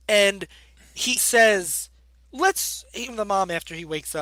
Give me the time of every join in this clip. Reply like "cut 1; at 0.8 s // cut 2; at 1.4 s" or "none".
cut 1; at 1.2 s // cut 2; at 3.1 s